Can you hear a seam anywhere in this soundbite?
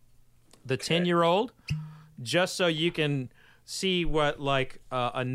no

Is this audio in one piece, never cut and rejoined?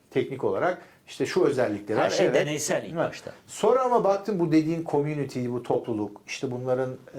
yes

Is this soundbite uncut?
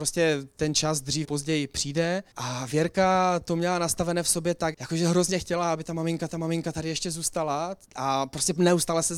no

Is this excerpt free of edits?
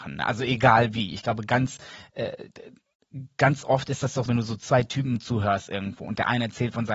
no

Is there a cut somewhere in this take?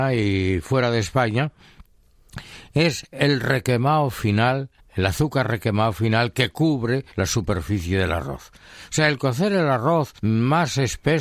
yes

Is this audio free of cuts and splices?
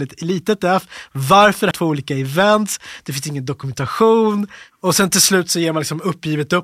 no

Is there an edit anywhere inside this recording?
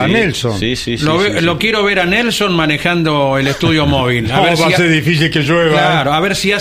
no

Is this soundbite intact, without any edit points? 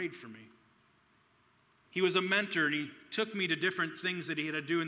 yes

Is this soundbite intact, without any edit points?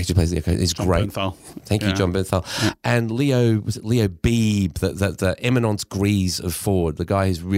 yes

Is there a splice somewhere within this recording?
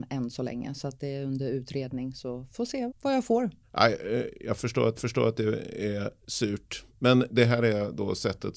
yes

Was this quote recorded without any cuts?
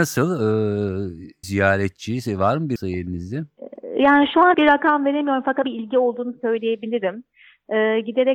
no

